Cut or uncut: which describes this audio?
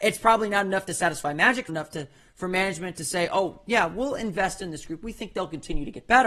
cut